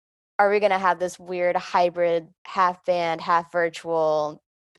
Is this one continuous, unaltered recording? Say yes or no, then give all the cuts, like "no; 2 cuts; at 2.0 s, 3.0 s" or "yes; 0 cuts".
no; 1 cut; at 2.4 s